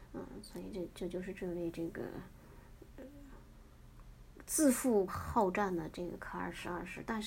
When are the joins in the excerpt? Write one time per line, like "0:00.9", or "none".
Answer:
0:05.1